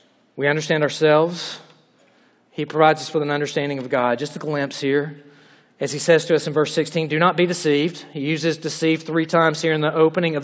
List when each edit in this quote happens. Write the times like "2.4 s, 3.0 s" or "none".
none